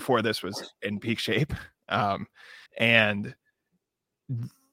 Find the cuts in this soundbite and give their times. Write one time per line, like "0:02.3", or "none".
0:02.7